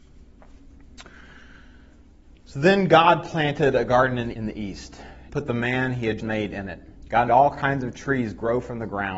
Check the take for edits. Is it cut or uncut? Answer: cut